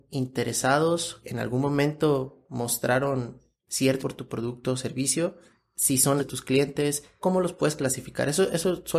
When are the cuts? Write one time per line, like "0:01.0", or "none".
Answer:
0:01.2
0:04.0
0:06.2